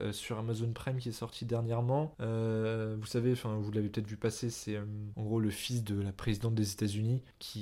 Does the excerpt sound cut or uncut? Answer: uncut